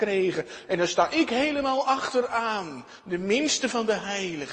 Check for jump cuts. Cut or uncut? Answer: uncut